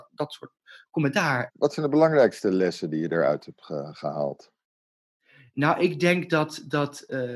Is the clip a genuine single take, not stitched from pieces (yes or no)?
yes